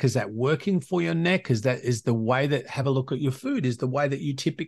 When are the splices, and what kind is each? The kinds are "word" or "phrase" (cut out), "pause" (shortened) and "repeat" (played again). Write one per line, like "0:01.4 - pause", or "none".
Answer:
none

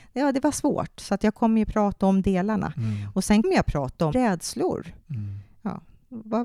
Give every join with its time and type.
0:02.0 - word
0:03.4 - word
0:04.1 - phrase

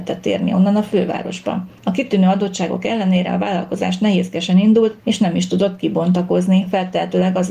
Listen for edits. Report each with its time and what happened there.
0:01.8 - pause
0:05.0 - pause

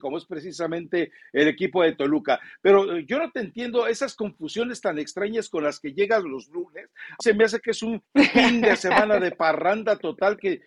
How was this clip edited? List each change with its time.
0:07.2 - word
0:08.0 - pause

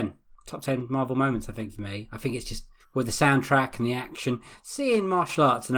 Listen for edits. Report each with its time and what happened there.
0:02.8 - pause

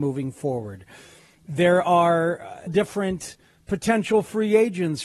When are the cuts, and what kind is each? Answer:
0:02.7 - word

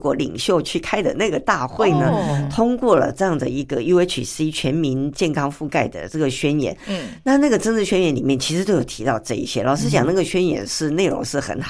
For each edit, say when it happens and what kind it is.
none

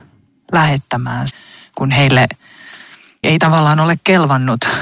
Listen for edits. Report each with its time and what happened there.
0:01.3 - word
0:03.2 - word

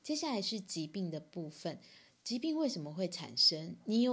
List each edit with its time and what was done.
none

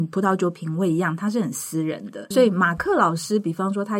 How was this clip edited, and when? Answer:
0:02.3 - word

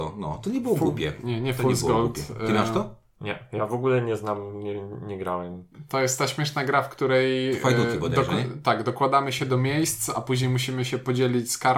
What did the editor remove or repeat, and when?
none

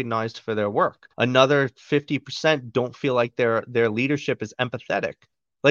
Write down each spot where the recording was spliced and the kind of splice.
0:01.1 - pause

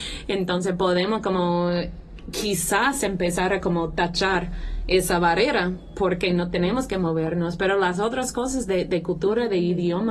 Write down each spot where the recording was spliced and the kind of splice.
none

